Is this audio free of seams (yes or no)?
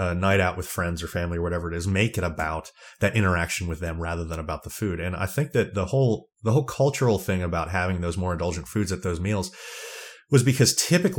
yes